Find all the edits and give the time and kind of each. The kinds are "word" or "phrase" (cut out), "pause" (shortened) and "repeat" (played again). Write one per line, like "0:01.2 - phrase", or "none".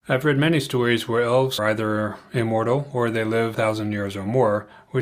0:01.6 - word
0:03.5 - word